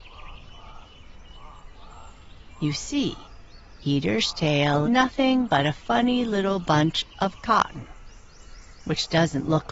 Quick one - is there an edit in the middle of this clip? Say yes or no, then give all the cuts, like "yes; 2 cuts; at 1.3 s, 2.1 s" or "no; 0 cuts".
yes; 1 cut; at 4.8 s